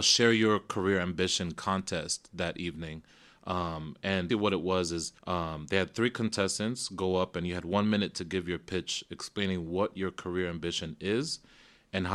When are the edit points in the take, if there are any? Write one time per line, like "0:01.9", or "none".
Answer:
0:04.3
0:05.2

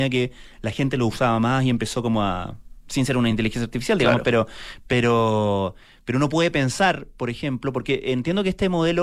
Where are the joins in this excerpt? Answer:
none

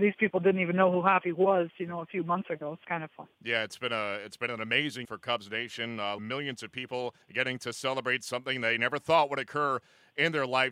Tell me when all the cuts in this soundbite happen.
0:02.8
0:03.3
0:05.0
0:06.2
0:07.2

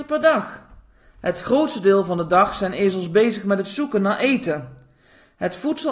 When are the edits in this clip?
none

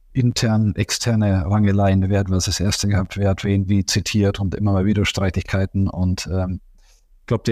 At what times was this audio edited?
none

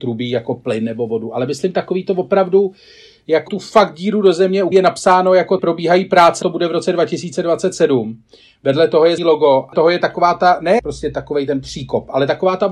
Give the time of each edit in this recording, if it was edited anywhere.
0:03.5
0:04.7
0:05.6
0:06.4
0:09.2
0:09.7
0:10.8

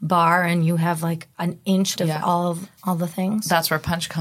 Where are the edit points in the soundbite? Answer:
0:02.0
0:02.8

